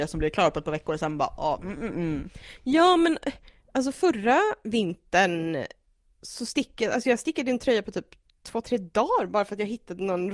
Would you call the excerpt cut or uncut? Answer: uncut